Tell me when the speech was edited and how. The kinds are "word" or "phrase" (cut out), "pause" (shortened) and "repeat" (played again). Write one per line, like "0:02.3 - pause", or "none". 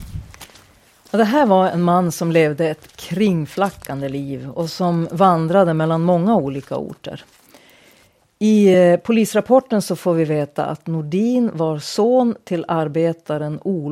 none